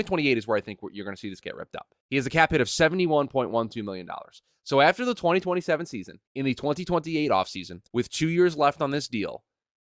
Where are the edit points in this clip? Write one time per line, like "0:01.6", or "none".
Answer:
0:01.4
0:02.0
0:06.3
0:07.9